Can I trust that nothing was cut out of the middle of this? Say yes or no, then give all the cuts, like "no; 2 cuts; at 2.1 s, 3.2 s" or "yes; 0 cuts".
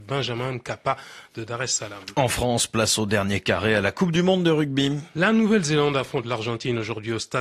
yes; 0 cuts